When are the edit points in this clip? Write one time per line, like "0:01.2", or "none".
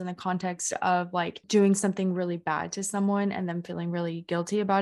none